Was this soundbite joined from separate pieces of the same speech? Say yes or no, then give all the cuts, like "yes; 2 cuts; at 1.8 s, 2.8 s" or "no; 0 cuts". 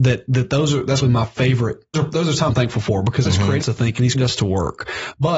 yes; 6 cuts; at 1.0 s, 1.9 s, 2.5 s, 3.2 s, 3.6 s, 4.1 s